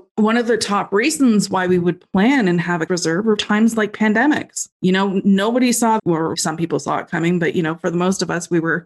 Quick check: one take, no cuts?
no; 5 cuts; at 2.9 s, 3.4 s, 4.7 s, 6.0 s, 6.3 s

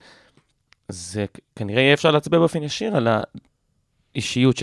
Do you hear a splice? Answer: no; 0 cuts

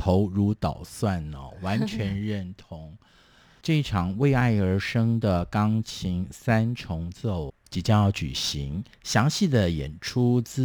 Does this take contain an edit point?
yes; 1 cut; at 8.9 s

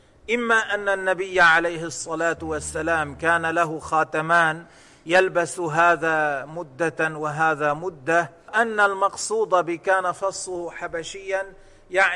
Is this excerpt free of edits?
no; 1 cut; at 8.5 s

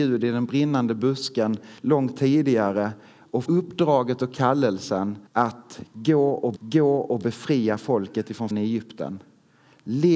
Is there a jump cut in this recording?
yes; 5 cuts; at 1.8 s, 3.5 s, 5.3 s, 6.6 s, 8.5 s

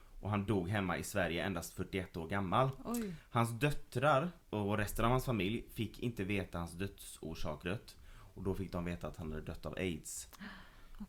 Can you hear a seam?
yes; 2 cuts; at 4.4 s, 7.6 s

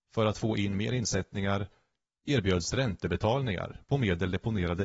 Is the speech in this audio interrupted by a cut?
no; 0 cuts

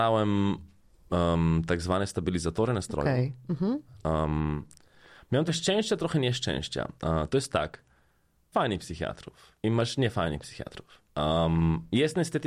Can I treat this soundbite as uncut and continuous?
no; 5 cuts; at 5.5 s, 7.0 s, 8.5 s, 9.6 s, 11.1 s

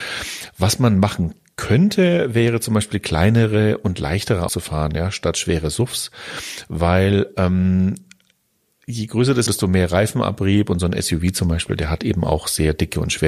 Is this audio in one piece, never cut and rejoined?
no; 2 cuts; at 4.5 s, 9.5 s

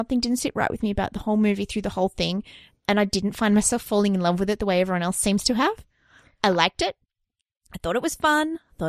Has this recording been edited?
no; 0 cuts

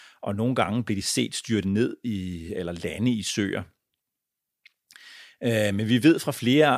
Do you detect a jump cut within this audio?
no; 0 cuts

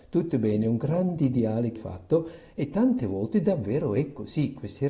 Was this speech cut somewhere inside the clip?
yes; 1 cut; at 1.8 s

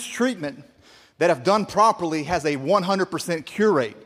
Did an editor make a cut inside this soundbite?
no; 0 cuts

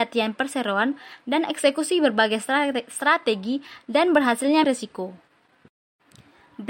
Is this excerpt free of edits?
no; 1 cut; at 4.6 s

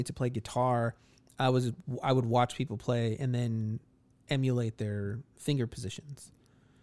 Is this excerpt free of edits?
yes; 0 cuts

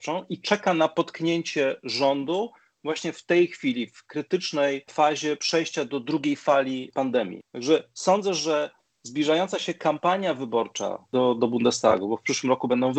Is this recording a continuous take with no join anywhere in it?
yes; 0 cuts

